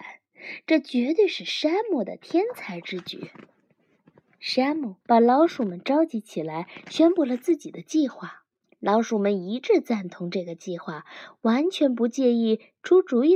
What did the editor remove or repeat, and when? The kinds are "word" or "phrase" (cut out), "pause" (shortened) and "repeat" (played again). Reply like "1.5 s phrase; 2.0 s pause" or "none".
5.0 s pause; 8.5 s pause